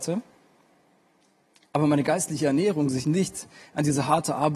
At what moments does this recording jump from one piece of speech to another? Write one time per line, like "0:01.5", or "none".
0:03.0